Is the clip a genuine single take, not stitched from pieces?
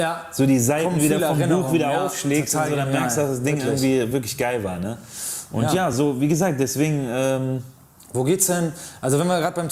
yes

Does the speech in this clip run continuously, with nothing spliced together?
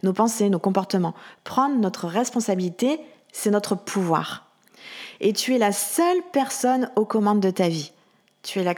yes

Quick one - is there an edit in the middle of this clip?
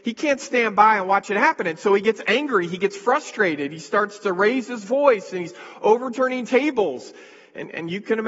no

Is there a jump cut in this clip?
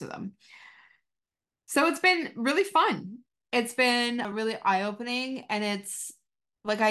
no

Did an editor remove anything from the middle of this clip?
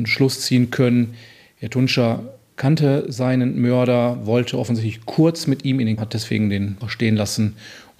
yes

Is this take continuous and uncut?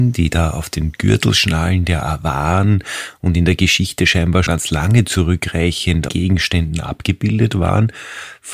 no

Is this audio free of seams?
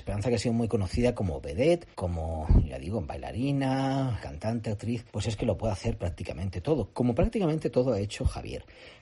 no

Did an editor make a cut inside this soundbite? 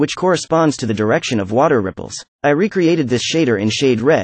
yes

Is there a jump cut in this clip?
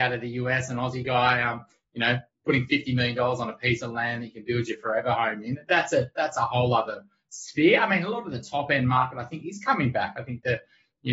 no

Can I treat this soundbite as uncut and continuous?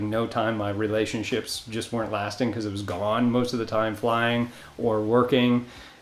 yes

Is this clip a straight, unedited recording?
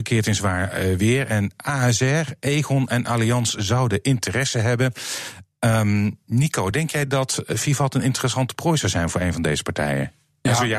yes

